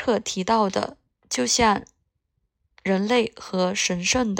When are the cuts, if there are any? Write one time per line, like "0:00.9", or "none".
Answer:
none

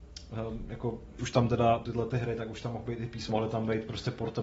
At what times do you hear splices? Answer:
0:01.2
0:01.8
0:03.3

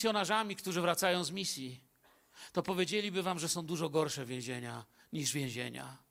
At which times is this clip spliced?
none

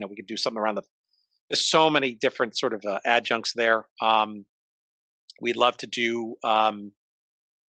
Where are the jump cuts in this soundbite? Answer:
none

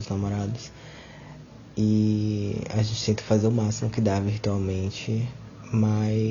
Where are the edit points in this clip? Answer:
none

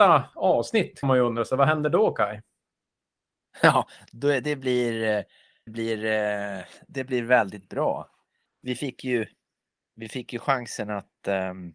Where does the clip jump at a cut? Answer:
0:01.0
0:05.7

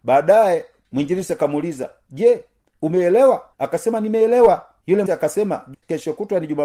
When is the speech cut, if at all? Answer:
0:03.5
0:05.1

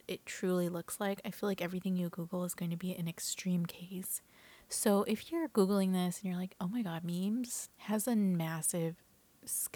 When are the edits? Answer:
0:07.7

